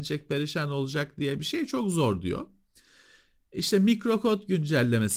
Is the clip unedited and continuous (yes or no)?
yes